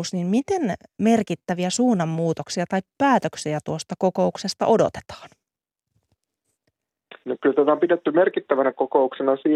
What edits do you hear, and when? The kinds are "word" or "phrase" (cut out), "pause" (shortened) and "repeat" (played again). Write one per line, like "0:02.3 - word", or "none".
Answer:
0:07.2 - pause